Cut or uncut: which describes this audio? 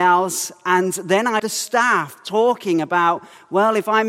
cut